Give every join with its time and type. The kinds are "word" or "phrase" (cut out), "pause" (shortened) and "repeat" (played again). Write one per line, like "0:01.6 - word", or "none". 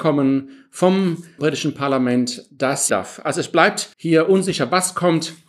0:01.4 - word
0:02.9 - phrase
0:03.9 - pause